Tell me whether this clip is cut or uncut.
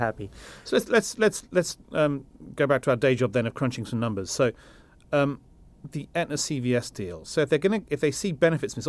uncut